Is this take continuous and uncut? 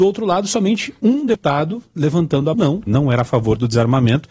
no; 2 cuts; at 2.5 s, 2.9 s

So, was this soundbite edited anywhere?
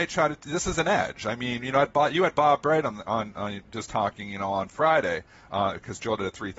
no; 0 cuts

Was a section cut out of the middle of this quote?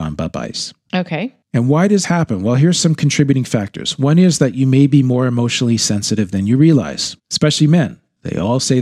yes; 2 cuts; at 2.0 s, 7.2 s

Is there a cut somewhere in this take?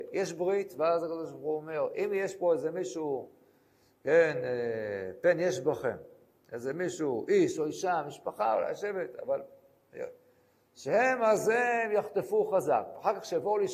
no; 0 cuts

